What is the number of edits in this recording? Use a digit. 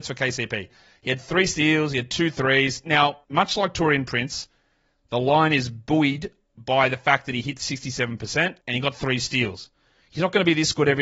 2